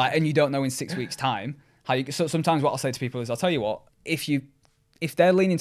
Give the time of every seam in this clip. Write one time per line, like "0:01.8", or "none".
0:03.9